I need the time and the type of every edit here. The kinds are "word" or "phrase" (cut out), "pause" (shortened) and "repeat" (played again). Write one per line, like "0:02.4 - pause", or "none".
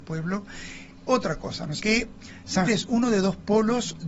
0:01.1 - word
0:01.8 - word
0:02.7 - word